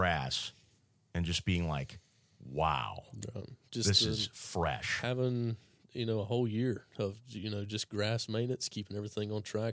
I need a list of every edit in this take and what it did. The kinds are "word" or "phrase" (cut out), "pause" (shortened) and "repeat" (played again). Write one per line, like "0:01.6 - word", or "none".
none